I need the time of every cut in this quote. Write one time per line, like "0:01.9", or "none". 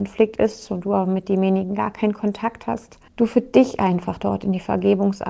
0:03.1